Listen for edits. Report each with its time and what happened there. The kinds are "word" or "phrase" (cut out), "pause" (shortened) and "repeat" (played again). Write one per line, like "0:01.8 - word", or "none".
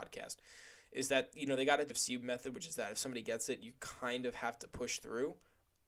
0:01.9 - word